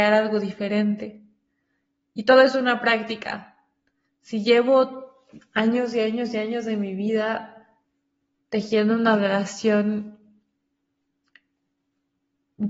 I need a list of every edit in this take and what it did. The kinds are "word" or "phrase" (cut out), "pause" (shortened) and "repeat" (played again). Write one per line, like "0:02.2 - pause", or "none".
none